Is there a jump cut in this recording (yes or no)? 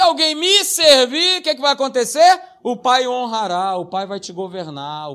no